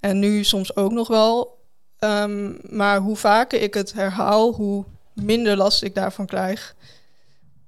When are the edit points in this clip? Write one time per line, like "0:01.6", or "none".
none